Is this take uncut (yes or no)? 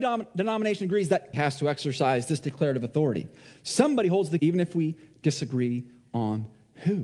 no